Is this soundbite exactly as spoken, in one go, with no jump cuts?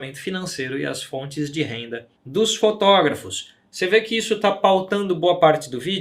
no; 1 cut; at 2.2 s

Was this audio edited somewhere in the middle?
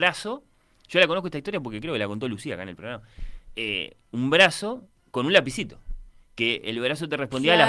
no; 0 cuts

